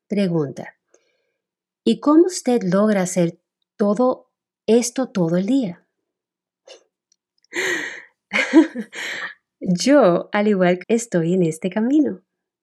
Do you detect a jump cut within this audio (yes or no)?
yes